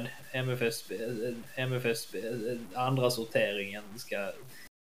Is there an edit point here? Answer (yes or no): yes